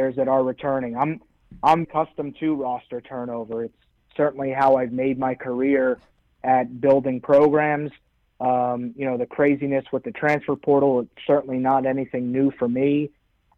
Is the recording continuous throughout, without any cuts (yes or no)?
no